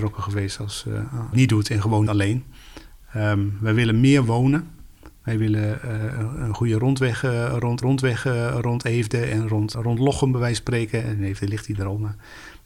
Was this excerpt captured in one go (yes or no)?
no